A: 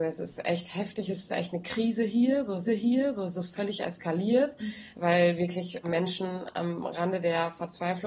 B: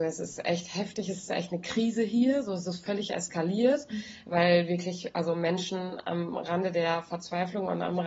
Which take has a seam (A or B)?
A